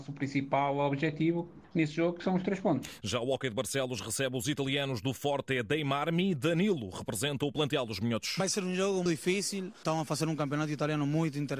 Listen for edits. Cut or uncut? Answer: cut